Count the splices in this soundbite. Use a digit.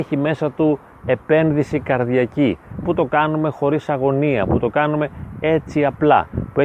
1